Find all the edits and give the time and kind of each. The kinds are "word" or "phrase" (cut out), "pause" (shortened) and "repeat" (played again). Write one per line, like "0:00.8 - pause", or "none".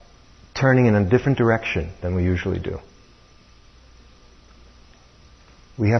none